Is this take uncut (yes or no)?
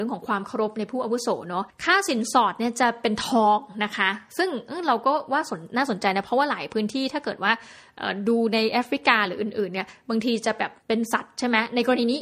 no